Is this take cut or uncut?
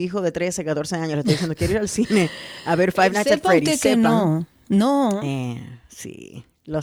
uncut